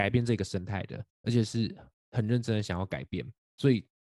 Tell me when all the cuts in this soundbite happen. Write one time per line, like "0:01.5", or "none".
0:01.1
0:01.9